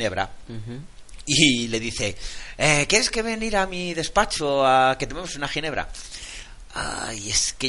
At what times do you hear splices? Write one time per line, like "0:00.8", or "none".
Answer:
none